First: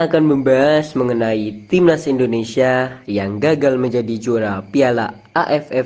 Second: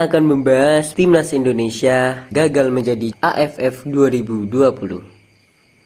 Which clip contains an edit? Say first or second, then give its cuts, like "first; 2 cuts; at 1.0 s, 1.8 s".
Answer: second; 3 cuts; at 0.9 s, 2.3 s, 3.1 s